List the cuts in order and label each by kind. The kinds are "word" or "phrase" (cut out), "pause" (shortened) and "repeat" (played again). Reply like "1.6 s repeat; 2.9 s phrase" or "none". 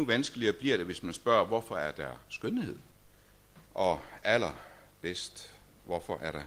3.7 s pause